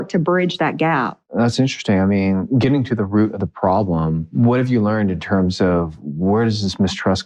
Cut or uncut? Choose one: uncut